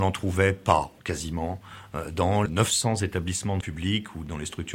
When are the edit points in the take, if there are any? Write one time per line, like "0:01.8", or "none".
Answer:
0:01.0
0:02.5
0:03.6